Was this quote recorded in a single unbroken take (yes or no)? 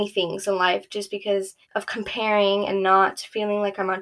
no